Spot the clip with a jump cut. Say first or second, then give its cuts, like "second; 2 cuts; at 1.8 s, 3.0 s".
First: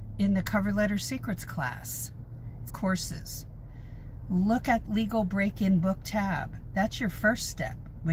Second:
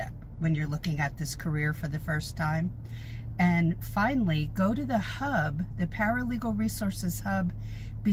first; 2 cuts; at 2.7 s, 4.8 s